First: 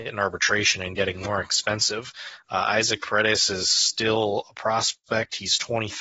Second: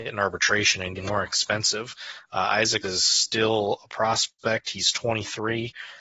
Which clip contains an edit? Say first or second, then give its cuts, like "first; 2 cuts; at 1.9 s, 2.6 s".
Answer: second; 2 cuts; at 1.0 s, 2.8 s